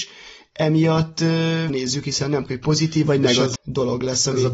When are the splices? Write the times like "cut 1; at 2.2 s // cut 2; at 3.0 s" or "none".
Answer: cut 1; at 1.7 s // cut 2; at 2.5 s // cut 3; at 3.6 s